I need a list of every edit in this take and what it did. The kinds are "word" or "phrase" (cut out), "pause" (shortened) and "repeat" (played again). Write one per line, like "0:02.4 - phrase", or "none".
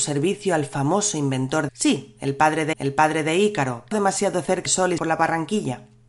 0:01.7 - word
0:02.7 - repeat
0:03.9 - word
0:04.7 - word
0:05.0 - phrase

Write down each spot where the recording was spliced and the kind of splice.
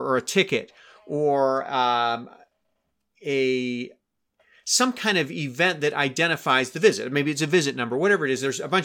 none

